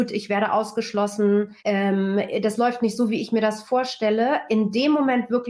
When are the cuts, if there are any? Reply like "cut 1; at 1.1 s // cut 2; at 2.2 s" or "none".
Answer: cut 1; at 1.6 s